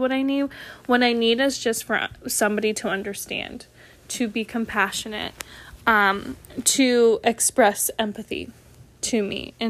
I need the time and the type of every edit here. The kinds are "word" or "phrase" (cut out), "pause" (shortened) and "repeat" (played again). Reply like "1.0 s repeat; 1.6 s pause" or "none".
none